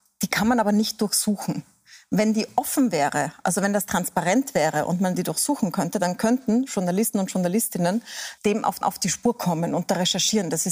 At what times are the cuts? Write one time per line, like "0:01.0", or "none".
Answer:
0:08.4
0:08.8